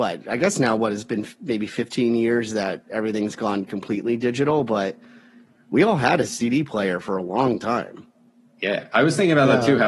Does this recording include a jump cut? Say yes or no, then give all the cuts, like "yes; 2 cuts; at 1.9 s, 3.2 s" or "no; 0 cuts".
no; 0 cuts